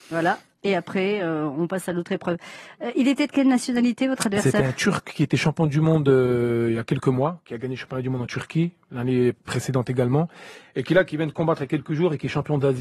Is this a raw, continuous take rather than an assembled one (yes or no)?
yes